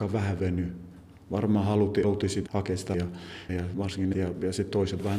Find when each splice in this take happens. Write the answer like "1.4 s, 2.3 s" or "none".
2.0 s, 2.5 s, 2.9 s, 3.5 s, 4.1 s